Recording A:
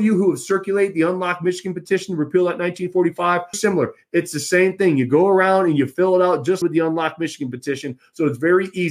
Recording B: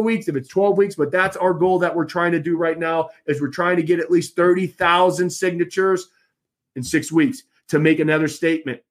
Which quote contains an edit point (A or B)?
A